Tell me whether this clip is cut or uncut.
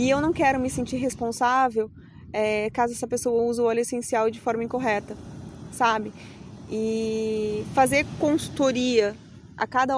uncut